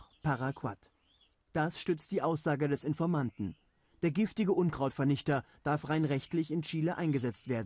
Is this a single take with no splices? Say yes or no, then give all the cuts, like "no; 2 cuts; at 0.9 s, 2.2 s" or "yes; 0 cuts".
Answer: yes; 0 cuts